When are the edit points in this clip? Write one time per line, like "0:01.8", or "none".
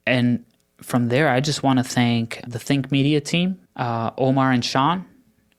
0:02.5
0:03.7